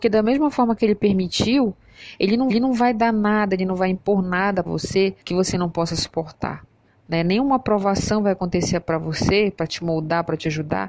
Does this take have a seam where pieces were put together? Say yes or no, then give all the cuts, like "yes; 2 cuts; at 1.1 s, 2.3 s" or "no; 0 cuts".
yes; 4 cuts; at 2.5 s, 4.7 s, 5.2 s, 6.9 s